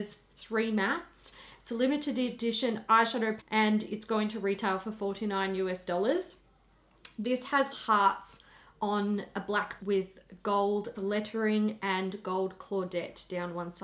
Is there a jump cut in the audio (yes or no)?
yes